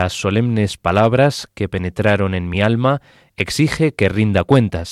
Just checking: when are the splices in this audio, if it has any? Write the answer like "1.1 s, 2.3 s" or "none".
none